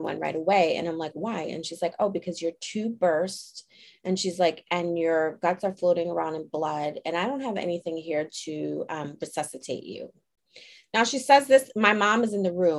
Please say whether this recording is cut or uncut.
uncut